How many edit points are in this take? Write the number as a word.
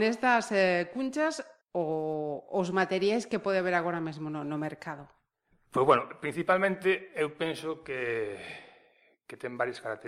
one